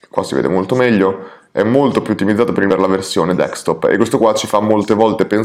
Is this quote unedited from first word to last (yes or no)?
no